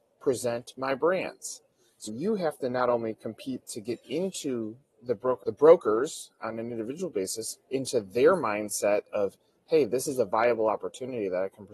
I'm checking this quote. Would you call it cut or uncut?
cut